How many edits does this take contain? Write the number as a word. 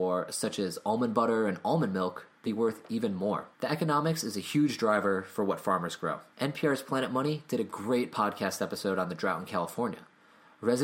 three